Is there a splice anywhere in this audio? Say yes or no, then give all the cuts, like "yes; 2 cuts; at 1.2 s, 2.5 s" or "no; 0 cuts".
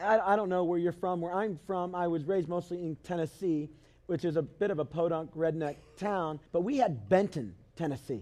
yes; 2 cuts; at 3.0 s, 6.5 s